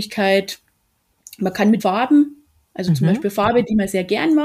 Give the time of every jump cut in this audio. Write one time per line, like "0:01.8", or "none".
0:01.8

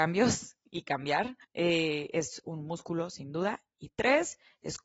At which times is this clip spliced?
0:01.4

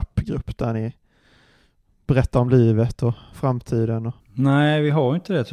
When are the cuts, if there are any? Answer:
none

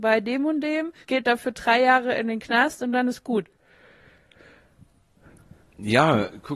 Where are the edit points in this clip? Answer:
0:01.0

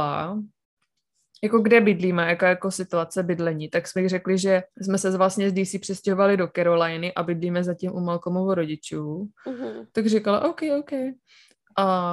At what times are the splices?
0:04.7

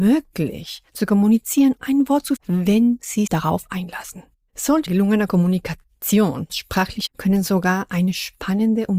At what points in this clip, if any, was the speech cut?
0:01.8
0:02.4
0:03.3
0:04.9
0:06.5
0:07.1

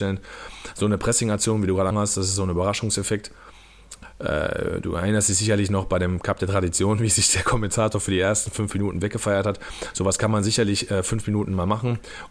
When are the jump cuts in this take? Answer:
0:01.9

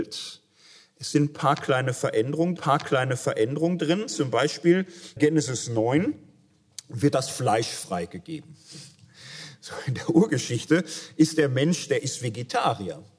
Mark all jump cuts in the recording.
0:02.6
0:05.2

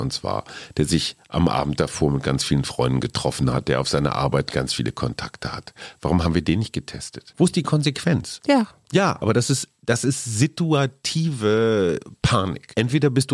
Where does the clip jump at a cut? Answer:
none

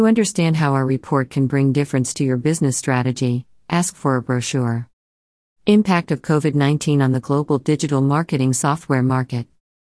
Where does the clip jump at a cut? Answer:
none

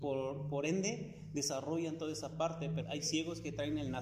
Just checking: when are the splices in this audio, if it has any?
0:02.8

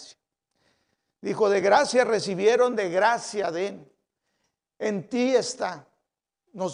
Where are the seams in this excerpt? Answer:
none

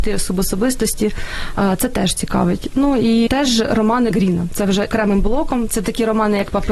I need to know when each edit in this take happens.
0:03.3
0:04.1
0:04.9

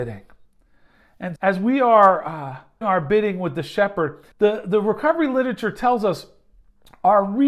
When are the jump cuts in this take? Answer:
0:01.4
0:02.8
0:04.3

